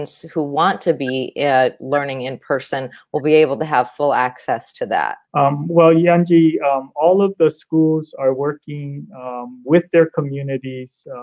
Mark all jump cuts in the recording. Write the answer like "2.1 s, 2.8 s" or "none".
5.2 s